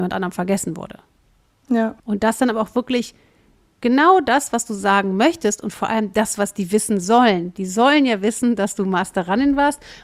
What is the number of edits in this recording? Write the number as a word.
one